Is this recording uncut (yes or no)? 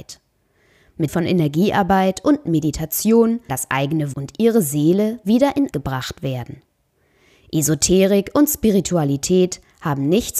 no